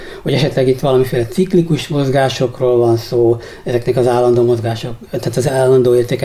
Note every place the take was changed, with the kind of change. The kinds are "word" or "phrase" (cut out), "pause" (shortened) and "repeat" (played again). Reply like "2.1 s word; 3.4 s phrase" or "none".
none